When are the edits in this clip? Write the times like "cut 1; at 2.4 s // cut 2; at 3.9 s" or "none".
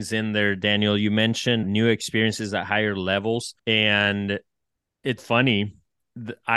cut 1; at 1.6 s // cut 2; at 3.6 s // cut 3; at 5.2 s